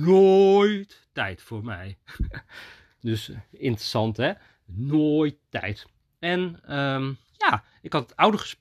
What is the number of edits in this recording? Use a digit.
1